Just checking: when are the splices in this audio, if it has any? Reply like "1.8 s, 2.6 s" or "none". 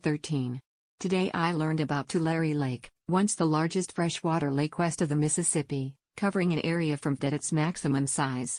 7.2 s